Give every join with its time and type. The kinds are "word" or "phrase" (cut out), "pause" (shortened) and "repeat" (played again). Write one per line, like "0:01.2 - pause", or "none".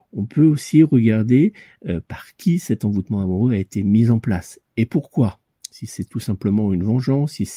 none